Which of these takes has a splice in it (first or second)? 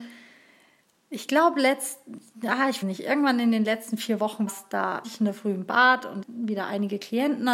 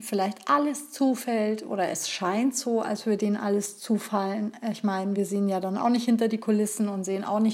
first